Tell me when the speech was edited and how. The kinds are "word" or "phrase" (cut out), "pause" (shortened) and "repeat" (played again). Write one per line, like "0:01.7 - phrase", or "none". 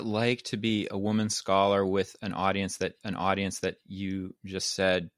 0:03.0 - repeat